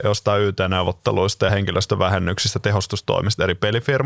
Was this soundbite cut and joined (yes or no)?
no